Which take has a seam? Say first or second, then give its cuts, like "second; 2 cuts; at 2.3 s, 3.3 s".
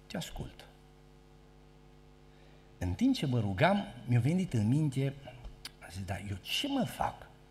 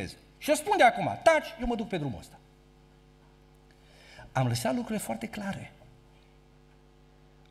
first; 1 cut; at 5.7 s